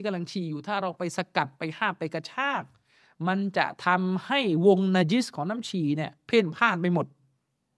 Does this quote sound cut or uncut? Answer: uncut